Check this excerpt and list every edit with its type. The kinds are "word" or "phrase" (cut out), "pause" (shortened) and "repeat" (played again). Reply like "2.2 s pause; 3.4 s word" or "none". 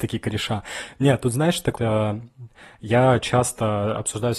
1.8 s word